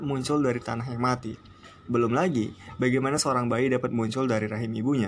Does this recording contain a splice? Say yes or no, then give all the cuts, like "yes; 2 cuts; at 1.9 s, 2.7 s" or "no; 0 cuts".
no; 0 cuts